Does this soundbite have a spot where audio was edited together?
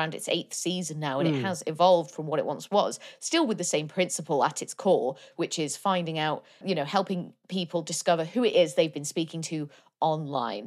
yes; 1 cut; at 6.6 s

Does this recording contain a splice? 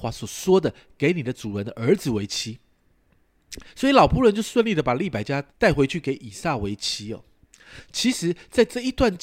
yes; 1 cut; at 5.5 s

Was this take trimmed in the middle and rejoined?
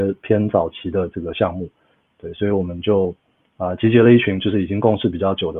no; 0 cuts

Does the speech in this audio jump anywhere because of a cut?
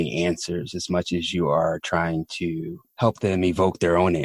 no; 0 cuts

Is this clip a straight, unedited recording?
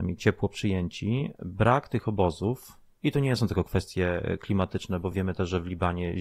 yes; 0 cuts

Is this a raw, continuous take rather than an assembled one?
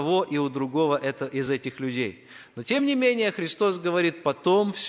yes; 0 cuts

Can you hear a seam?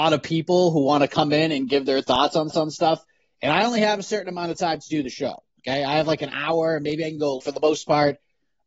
yes; 3 cuts; at 2.5 s, 5.5 s, 7.4 s

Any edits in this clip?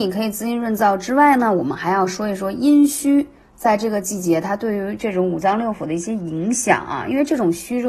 no; 0 cuts

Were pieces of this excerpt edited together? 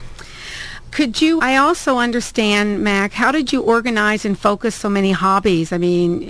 yes; 2 cuts; at 0.9 s, 1.4 s

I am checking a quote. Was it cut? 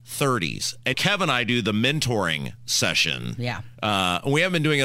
yes; 1 cut; at 0.9 s

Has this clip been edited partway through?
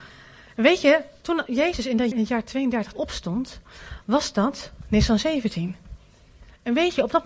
yes; 2 cuts; at 2.1 s, 2.9 s

